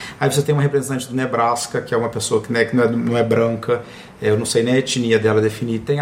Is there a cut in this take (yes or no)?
no